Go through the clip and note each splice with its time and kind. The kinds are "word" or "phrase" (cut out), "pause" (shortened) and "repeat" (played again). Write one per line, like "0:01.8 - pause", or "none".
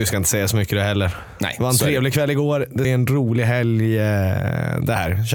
0:02.8 - phrase